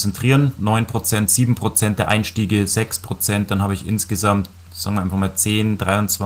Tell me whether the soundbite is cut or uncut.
uncut